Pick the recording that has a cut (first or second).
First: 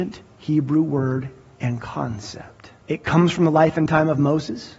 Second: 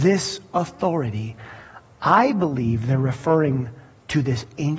first